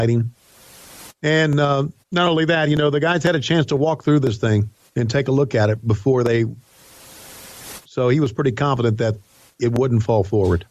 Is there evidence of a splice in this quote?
yes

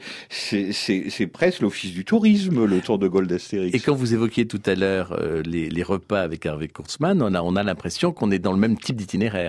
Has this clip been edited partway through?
no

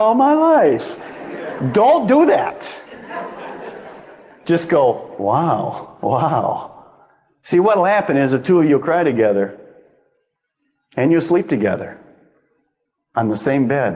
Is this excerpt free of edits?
yes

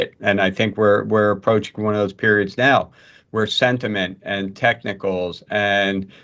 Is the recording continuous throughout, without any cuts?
yes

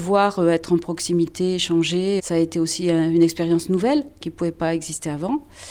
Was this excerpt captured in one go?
no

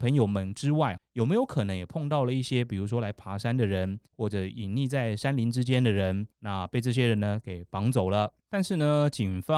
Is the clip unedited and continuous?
no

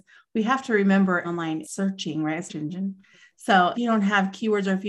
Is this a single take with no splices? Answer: no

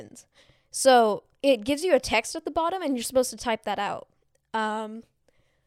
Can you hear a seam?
no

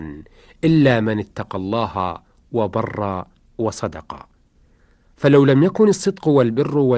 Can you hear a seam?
no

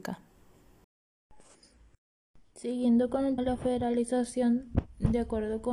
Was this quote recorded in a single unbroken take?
no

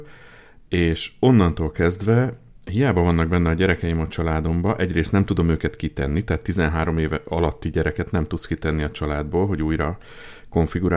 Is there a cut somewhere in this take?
no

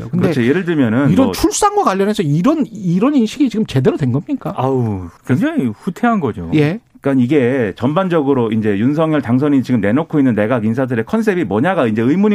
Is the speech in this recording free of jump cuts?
no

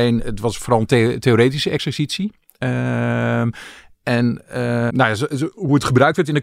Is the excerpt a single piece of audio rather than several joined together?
no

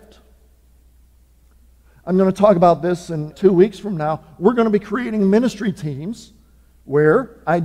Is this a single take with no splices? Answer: no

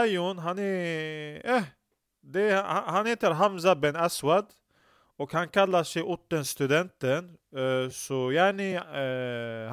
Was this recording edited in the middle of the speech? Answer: no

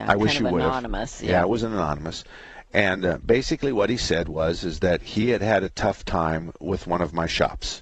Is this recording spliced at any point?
no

